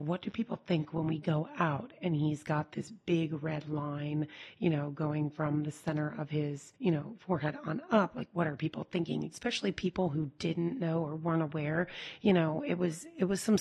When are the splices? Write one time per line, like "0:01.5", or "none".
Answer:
0:06.8